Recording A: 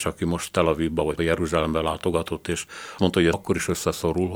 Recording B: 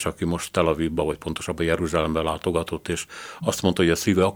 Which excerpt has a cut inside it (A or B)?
A